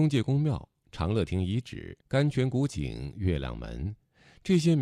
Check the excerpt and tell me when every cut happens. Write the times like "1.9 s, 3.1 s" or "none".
2.0 s